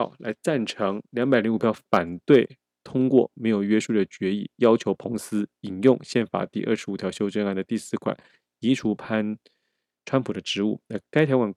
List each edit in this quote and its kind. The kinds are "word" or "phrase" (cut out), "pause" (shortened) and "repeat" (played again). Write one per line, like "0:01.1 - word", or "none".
0:02.8 - word